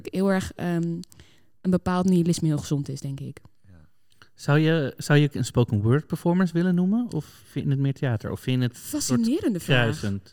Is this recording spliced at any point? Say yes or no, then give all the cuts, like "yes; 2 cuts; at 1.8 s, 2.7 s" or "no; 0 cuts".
yes; 1 cut; at 5.3 s